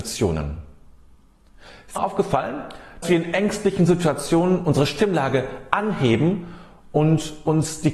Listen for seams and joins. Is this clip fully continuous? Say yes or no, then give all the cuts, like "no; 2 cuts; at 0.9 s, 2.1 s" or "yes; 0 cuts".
no; 2 cuts; at 2.0 s, 3.0 s